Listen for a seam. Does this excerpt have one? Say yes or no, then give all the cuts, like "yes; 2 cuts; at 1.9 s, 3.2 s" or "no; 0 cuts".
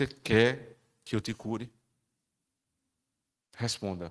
no; 0 cuts